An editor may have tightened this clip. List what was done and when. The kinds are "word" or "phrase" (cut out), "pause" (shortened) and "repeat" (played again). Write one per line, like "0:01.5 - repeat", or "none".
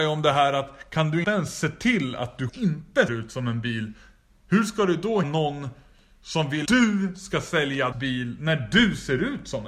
0:01.2 - word
0:02.5 - word
0:03.1 - word
0:05.2 - word
0:06.6 - word
0:07.9 - word